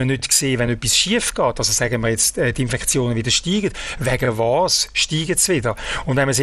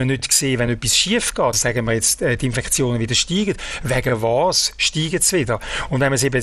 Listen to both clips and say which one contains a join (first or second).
second